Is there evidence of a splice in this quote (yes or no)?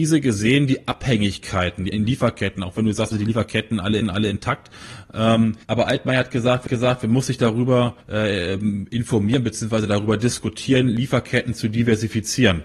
yes